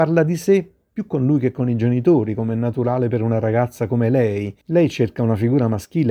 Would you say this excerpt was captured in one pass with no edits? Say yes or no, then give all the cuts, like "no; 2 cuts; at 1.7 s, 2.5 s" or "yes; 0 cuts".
no; 1 cut; at 4.6 s